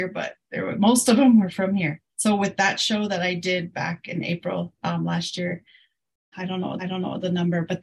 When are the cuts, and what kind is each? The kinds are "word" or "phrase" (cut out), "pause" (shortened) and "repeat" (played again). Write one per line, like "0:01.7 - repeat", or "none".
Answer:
0:02.1 - pause
0:04.8 - word
0:06.3 - word
0:06.8 - repeat